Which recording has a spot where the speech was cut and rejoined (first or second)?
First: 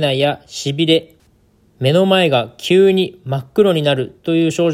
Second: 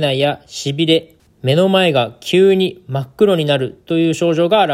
second